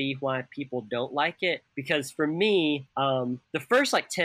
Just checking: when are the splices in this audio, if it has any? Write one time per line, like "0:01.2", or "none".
0:01.7